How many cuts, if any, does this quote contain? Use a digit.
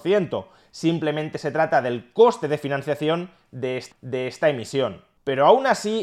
1